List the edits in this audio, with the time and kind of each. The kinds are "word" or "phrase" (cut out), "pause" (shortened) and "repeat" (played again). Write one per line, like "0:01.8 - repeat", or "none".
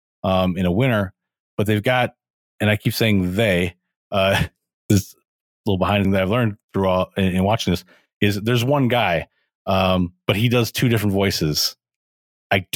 0:06.0 - phrase